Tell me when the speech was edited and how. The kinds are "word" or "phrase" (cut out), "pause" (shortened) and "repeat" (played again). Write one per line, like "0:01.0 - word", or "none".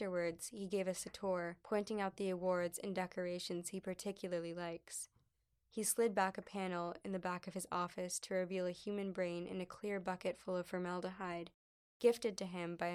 0:01.6 - pause